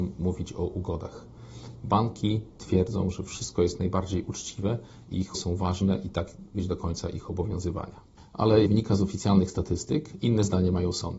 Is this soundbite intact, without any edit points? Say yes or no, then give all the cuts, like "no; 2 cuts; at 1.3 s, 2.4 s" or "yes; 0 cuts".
no; 4 cuts; at 3.8 s, 5.3 s, 6.5 s, 8.7 s